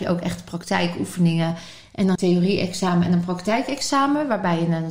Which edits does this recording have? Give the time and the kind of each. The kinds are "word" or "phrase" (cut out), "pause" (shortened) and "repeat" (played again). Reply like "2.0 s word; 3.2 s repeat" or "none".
2.2 s phrase